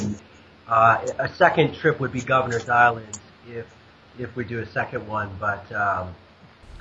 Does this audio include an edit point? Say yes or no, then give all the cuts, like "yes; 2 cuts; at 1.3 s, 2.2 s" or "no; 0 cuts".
no; 0 cuts